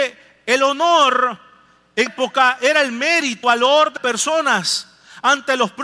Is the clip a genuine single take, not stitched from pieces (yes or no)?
no